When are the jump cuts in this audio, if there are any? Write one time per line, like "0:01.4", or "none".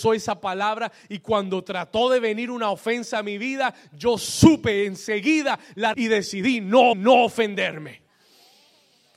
0:05.9
0:06.9